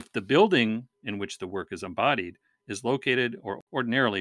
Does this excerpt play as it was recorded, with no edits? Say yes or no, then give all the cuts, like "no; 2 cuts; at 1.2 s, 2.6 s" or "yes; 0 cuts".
yes; 0 cuts